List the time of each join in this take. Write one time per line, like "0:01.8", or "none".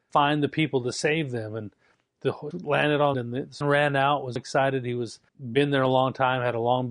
0:02.5
0:03.1
0:03.6
0:04.4
0:05.3